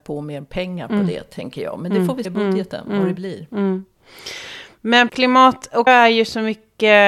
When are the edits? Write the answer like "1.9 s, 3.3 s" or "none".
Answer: 2.2 s, 5.1 s, 5.9 s